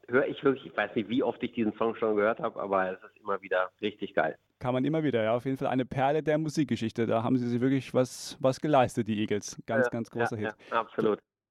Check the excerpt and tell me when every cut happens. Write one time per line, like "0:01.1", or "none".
0:03.7
0:10.6